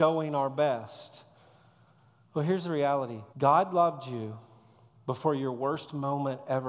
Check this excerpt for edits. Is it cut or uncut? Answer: cut